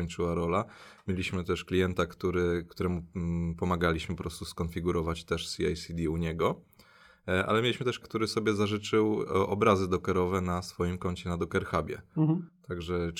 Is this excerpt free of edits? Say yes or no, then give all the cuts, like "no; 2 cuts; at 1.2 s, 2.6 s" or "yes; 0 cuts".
no; 1 cut; at 8.0 s